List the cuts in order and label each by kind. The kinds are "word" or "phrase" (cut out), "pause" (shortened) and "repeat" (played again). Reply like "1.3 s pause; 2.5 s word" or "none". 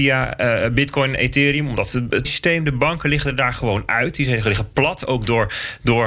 2.2 s word